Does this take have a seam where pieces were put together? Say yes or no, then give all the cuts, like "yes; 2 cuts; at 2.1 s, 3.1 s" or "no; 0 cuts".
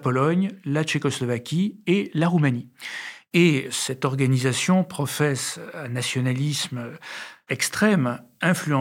no; 0 cuts